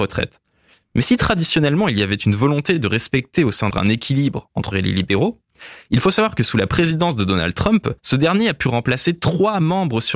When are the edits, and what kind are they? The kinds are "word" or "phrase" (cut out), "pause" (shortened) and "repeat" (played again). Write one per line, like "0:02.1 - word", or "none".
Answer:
0:03.7 - phrase
0:04.7 - phrase
0:08.0 - pause

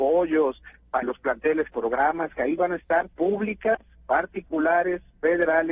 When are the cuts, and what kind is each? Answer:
0:01.0 - word
0:01.7 - phrase
0:03.1 - pause

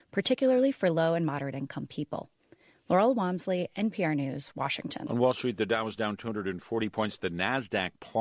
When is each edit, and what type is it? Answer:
none

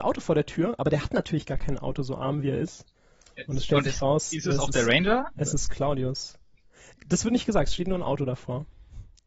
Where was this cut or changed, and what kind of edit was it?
none

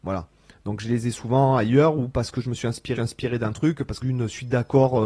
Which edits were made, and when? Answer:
0:03.0 - repeat
0:04.0 - phrase

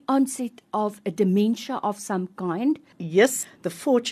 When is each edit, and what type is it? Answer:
none

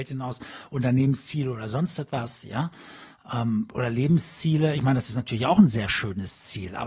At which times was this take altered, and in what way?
none

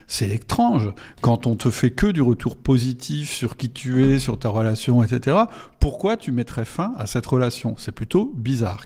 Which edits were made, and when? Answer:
none

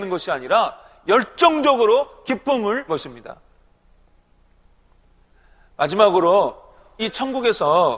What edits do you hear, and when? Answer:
0:02.9 - word
0:07.0 - word

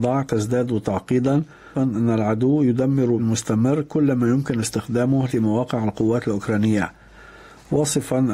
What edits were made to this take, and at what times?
0:01.7 - word
0:03.2 - word
0:05.3 - word

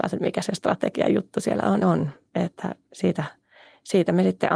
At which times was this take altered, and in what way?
0:01.8 - phrase

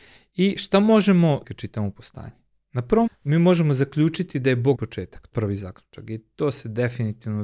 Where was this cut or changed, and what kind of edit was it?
0:01.4 - word
0:03.1 - word
0:04.7 - word
0:05.3 - word

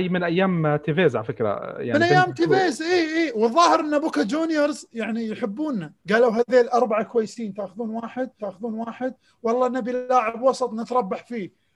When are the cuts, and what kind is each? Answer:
0:06.0 - pause
0:08.4 - repeat

